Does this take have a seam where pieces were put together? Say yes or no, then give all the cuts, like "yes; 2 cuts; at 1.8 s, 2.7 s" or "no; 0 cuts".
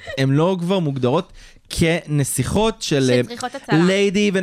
no; 0 cuts